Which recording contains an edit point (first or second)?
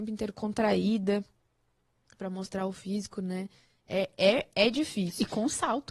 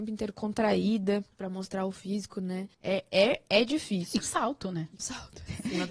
second